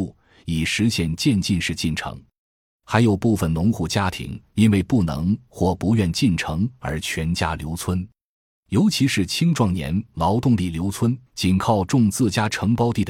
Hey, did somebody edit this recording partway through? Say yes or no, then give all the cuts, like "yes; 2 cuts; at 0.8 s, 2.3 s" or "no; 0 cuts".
yes; 1 cut; at 11.3 s